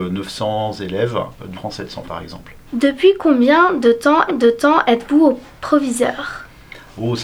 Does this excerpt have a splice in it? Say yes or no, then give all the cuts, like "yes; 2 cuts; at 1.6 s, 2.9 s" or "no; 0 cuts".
yes; 4 cuts; at 1.5 s, 2.0 s, 2.7 s, 4.3 s